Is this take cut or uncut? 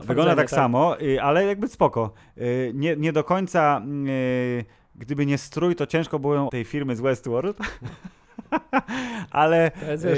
cut